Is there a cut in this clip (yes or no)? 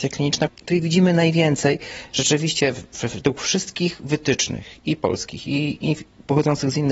no